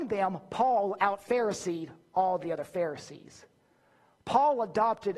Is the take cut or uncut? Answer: uncut